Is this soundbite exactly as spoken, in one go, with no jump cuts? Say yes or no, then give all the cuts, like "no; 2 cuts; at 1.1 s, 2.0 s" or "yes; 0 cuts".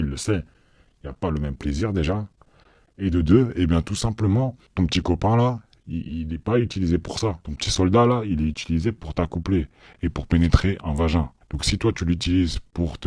yes; 0 cuts